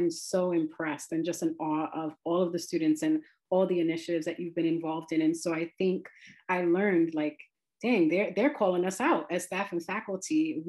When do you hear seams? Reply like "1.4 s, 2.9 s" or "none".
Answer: none